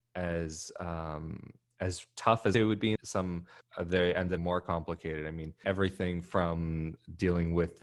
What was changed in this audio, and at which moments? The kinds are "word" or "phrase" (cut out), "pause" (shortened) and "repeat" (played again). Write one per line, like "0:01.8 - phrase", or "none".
0:02.5 - phrase
0:03.0 - phrase
0:03.6 - phrase
0:04.4 - phrase
0:05.6 - word